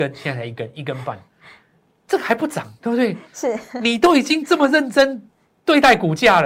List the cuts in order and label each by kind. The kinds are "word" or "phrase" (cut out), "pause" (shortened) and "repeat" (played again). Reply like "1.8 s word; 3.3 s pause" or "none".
none